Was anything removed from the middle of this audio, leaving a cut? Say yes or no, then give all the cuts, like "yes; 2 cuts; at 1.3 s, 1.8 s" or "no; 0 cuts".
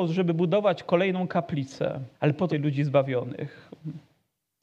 yes; 2 cuts; at 2.1 s, 2.5 s